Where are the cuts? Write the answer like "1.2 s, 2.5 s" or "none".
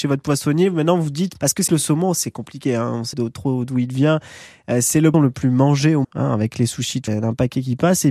1.3 s, 1.7 s, 3.1 s, 5.1 s, 6.0 s, 7.1 s